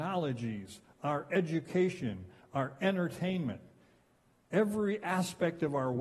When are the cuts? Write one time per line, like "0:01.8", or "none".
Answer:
none